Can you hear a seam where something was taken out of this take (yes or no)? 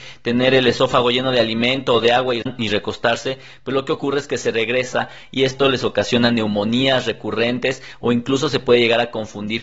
no